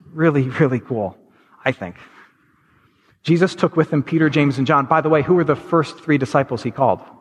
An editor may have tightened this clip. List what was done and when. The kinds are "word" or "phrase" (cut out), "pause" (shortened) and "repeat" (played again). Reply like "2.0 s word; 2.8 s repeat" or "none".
none